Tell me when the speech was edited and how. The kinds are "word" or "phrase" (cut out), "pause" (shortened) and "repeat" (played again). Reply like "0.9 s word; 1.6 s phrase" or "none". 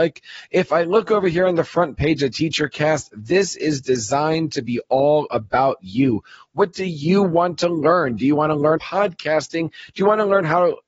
8.8 s word